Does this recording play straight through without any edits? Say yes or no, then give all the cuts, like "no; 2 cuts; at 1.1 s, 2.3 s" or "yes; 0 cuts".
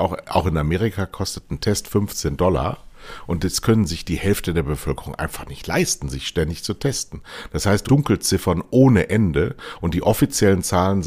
no; 1 cut; at 7.9 s